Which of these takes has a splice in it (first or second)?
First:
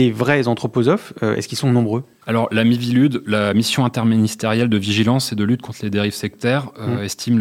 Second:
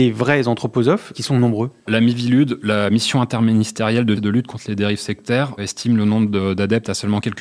second